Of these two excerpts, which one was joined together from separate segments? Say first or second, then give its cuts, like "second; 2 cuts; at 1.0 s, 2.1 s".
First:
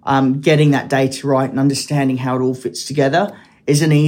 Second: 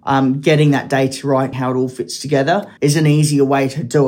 second; 2 cuts; at 1.5 s, 2.8 s